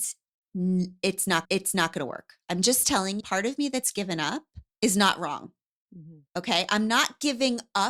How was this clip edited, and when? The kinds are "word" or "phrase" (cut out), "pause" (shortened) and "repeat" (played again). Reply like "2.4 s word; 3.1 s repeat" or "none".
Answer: 1.4 s repeat; 3.2 s phrase; 4.7 s pause; 6.3 s pause